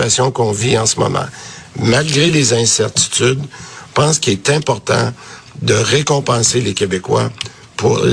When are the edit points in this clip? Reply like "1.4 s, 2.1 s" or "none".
none